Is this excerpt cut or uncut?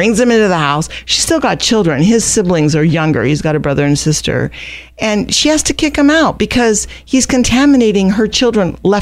uncut